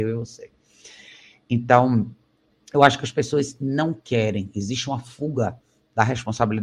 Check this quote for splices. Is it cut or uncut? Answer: uncut